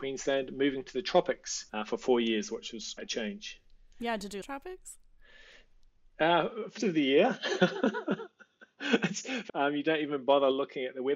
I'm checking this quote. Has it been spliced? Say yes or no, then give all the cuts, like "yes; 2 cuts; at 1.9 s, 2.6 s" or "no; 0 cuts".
yes; 5 cuts; at 1.7 s, 3.0 s, 4.4 s, 6.8 s, 9.5 s